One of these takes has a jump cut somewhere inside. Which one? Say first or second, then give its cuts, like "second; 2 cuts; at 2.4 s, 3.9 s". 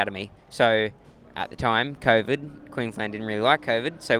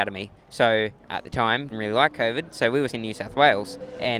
second; 3 cuts; at 1.0 s, 1.7 s, 2.9 s